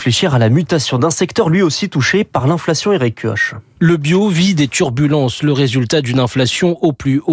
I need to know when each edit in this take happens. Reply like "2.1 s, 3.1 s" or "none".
none